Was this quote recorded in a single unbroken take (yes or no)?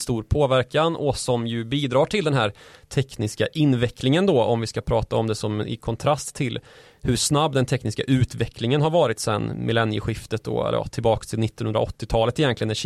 yes